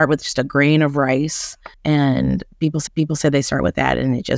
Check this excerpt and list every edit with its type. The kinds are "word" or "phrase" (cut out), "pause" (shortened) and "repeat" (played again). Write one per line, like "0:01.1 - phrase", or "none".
0:01.7 - pause
0:02.9 - repeat